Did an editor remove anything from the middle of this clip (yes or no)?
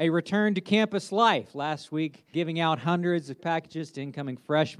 yes